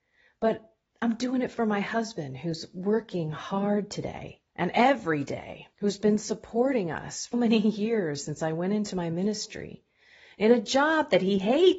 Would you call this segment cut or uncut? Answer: cut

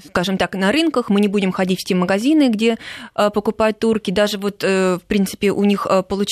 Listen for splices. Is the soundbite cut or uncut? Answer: uncut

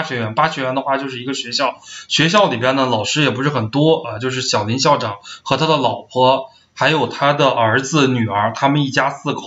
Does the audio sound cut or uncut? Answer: uncut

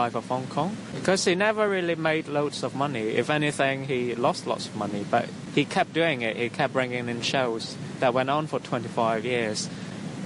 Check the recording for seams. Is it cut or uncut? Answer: uncut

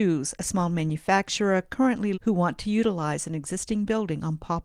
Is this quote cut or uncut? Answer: cut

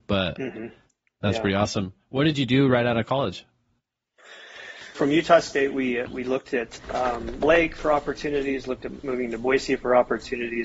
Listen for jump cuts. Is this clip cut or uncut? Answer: cut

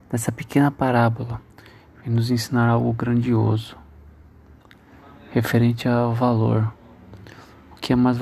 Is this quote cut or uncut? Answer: uncut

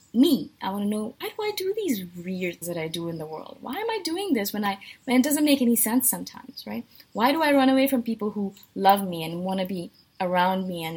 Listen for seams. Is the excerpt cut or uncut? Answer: cut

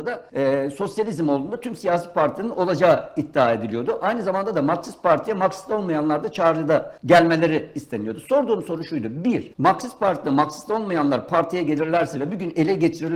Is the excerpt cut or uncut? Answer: uncut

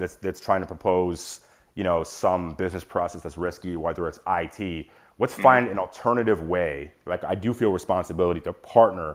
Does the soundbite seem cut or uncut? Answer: uncut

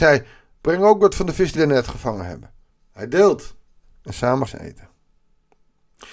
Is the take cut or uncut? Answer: cut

